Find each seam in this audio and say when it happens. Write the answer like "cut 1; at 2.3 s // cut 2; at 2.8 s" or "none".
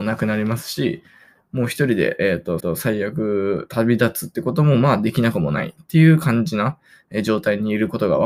cut 1; at 2.6 s